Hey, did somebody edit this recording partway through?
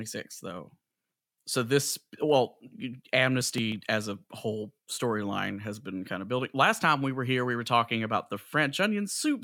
no; 0 cuts

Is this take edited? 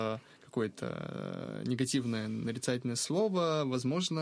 no; 0 cuts

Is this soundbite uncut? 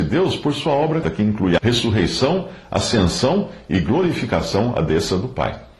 no; 2 cuts; at 1.0 s, 1.6 s

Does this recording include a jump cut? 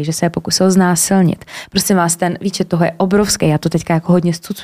no; 0 cuts

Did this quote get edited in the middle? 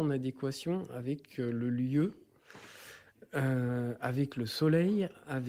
no; 0 cuts

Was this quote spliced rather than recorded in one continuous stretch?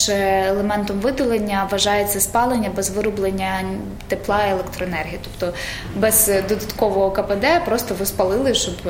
no; 0 cuts

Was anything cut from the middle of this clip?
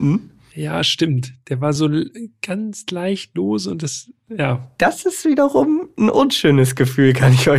no; 0 cuts

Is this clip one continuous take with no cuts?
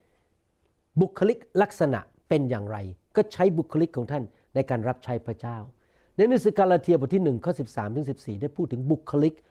yes; 0 cuts

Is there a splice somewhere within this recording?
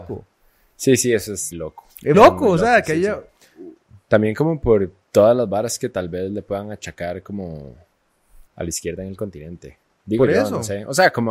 yes; 4 cuts; at 1.5 s, 2.1 s, 5.0 s, 8.5 s

